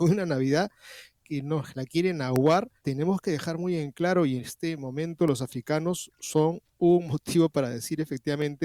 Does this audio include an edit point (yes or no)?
yes